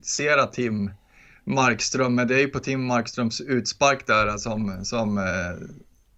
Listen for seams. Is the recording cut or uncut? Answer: uncut